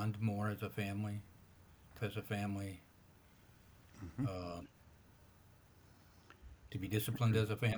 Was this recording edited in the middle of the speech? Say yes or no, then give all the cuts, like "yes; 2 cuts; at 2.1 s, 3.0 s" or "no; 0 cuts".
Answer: yes; 1 cut; at 2.0 s